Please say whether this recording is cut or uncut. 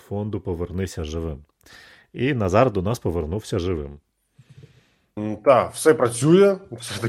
uncut